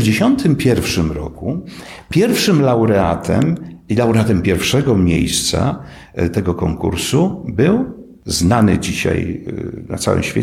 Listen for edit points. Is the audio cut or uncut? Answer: uncut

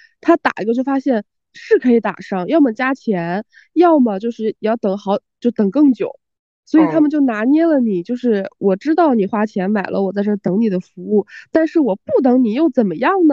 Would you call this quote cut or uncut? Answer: cut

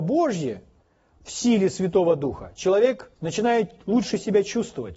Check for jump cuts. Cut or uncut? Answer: cut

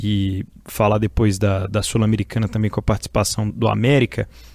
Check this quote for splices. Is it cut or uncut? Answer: cut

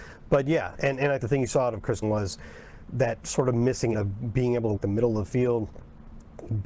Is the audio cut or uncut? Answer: cut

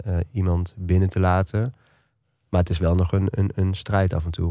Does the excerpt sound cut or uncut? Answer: uncut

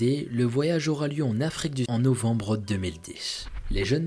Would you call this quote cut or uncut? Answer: cut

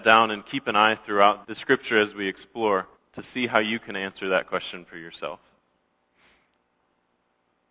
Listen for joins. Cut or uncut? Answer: cut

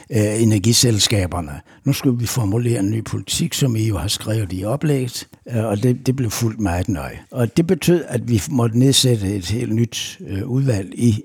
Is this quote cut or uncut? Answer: cut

